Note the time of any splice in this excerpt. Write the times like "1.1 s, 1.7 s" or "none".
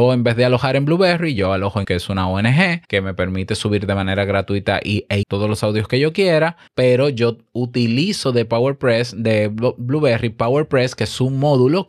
1.8 s, 2.8 s, 5.2 s, 6.7 s